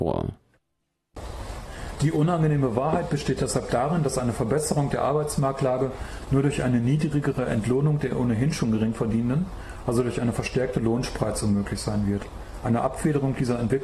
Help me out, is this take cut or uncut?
uncut